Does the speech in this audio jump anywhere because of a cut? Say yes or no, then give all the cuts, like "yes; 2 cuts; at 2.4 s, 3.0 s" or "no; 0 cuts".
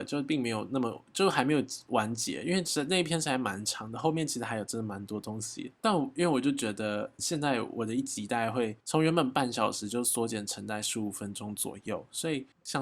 yes; 2 cuts; at 7.2 s, 8.8 s